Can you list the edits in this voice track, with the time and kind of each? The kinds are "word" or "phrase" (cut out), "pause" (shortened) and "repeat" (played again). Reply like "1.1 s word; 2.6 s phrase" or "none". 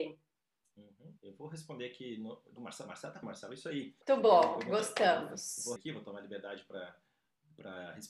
1.2 s pause; 2.6 s word; 3.2 s word; 4.0 s pause; 5.8 s phrase